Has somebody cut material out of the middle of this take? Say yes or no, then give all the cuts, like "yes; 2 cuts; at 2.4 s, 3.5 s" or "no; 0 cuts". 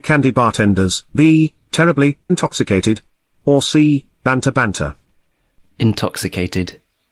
yes; 2 cuts; at 1.1 s, 2.3 s